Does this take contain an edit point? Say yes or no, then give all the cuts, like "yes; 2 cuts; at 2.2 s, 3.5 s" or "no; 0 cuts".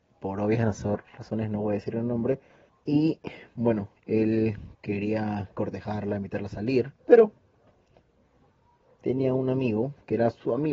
yes; 3 cuts; at 2.7 s, 4.0 s, 7.0 s